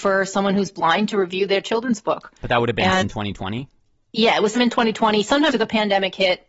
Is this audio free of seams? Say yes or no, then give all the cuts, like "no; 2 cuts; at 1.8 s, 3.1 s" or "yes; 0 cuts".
no; 3 cuts; at 3.0 s, 4.5 s, 5.5 s